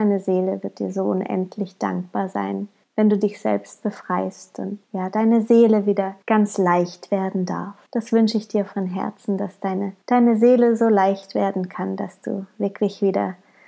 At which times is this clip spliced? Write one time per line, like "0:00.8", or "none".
0:02.8
0:04.8
0:06.2
0:07.9
0:10.0